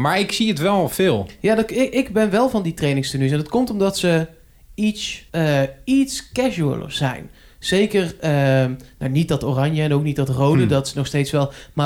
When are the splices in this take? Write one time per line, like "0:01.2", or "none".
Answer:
0:05.3